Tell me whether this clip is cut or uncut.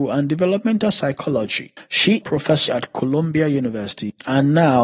cut